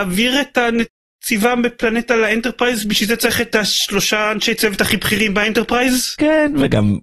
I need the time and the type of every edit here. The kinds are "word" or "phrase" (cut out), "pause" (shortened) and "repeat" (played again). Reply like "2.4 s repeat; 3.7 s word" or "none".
none